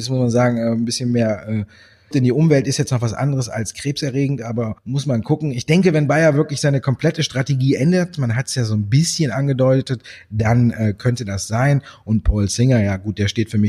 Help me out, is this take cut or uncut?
cut